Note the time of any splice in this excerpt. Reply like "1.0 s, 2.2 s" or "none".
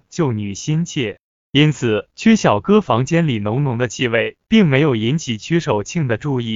2.1 s, 4.4 s

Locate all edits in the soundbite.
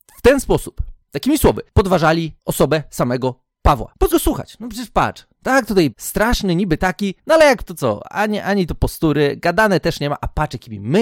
1.0 s, 4.1 s, 5.9 s, 7.7 s

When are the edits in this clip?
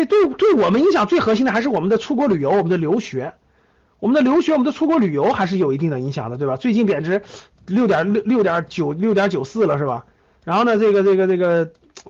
none

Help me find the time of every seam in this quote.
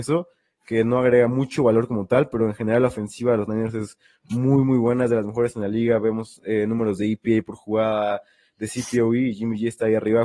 none

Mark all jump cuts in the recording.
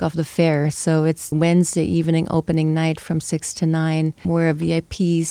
1.3 s, 4.2 s

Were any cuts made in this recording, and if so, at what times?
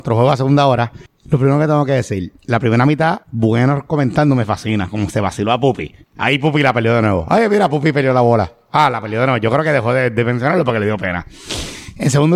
1.1 s, 2.4 s, 3.2 s, 6.0 s

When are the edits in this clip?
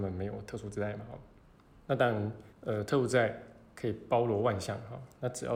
1.4 s, 2.5 s

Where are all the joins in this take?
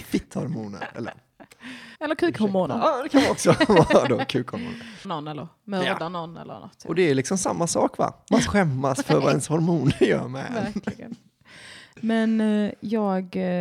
2.0 s, 5.0 s, 8.5 s

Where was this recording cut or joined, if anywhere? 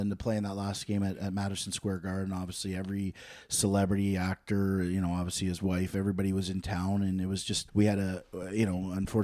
7.7 s

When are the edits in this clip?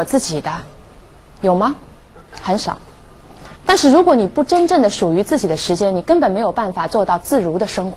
3.6 s

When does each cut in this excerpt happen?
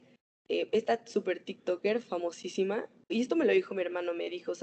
3.1 s

